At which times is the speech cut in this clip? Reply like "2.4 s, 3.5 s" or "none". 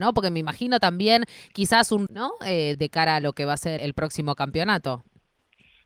2.1 s, 2.7 s, 3.8 s